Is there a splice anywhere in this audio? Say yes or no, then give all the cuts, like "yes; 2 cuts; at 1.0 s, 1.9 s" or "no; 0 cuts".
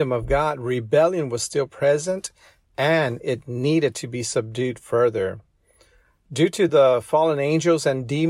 no; 0 cuts